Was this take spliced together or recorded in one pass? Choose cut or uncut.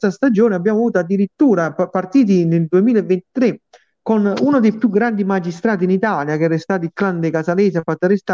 uncut